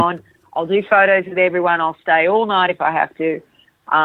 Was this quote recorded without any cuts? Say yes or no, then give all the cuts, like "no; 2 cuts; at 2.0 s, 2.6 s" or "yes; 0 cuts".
yes; 0 cuts